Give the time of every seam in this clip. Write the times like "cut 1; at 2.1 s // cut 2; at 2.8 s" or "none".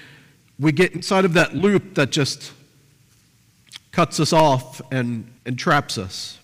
cut 1; at 5.4 s